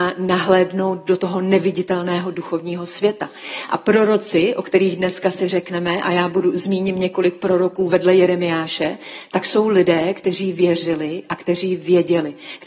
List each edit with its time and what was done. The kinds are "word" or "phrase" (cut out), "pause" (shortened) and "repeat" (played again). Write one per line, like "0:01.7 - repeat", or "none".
none